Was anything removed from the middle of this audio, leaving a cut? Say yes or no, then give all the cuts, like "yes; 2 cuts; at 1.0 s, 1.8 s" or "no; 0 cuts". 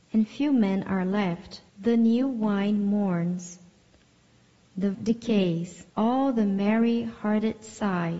yes; 3 cuts; at 1.7 s, 4.9 s, 5.9 s